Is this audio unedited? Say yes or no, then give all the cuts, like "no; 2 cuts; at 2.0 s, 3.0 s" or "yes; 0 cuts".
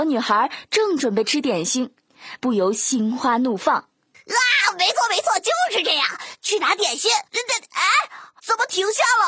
no; 2 cuts; at 7.3 s, 8.4 s